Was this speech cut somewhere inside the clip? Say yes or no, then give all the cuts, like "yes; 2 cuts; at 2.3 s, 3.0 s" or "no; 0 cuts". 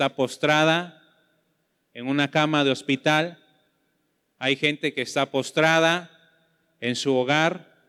no; 0 cuts